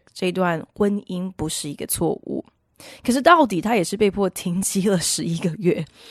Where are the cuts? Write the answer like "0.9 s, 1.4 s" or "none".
none